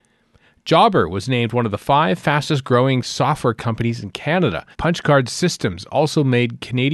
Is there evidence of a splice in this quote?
yes; 1 cut; at 4.7 s

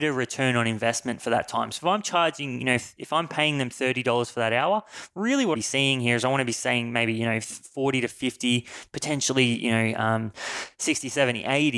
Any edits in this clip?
yes; 1 cut; at 5.5 s

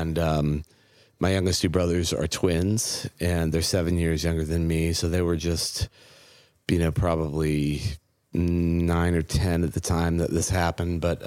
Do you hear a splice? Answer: no; 0 cuts

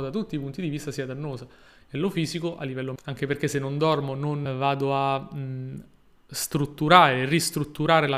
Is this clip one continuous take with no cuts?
no; 2 cuts; at 3.0 s, 4.5 s

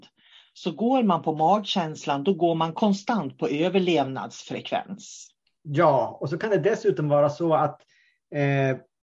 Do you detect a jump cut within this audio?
no; 0 cuts

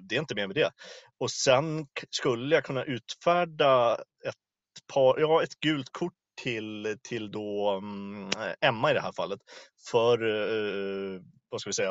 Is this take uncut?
yes; 0 cuts

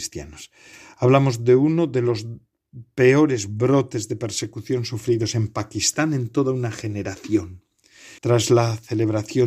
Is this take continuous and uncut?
no; 1 cut; at 8.2 s

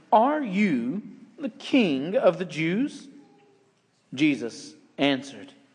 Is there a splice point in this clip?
no; 0 cuts

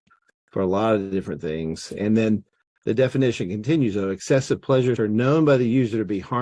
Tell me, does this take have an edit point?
yes; 1 cut; at 5.0 s

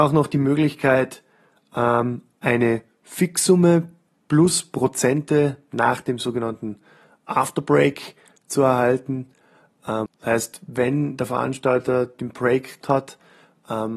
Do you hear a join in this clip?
yes; 2 cuts; at 10.1 s, 12.8 s

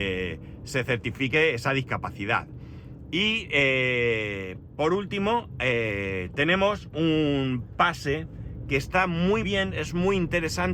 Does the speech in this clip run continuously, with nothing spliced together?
no; 1 cut; at 9.4 s

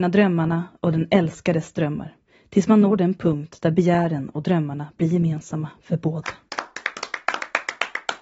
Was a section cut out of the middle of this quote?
no; 0 cuts

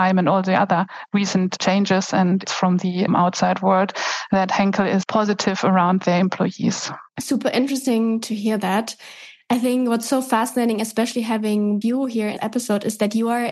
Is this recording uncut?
no; 6 cuts; at 2.4 s, 3.1 s, 5.0 s, 7.1 s, 11.8 s, 12.4 s

